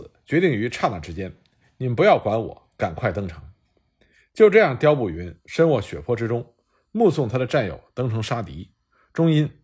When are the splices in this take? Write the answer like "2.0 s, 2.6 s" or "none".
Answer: none